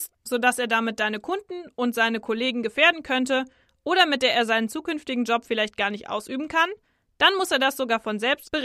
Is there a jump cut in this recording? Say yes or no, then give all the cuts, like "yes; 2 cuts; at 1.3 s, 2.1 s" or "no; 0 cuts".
no; 0 cuts